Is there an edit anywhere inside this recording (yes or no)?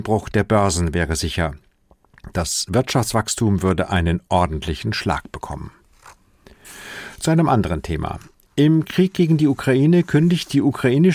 no